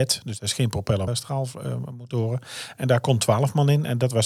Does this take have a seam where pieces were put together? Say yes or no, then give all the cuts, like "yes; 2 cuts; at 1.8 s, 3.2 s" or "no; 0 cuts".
yes; 1 cut; at 1.1 s